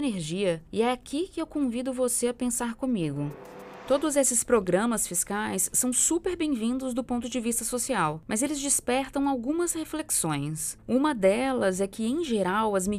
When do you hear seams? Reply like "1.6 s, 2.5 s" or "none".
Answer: none